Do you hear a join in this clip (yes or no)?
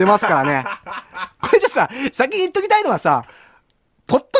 no